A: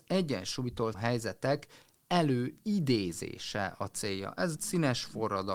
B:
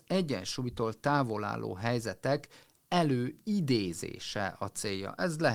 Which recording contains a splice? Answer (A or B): A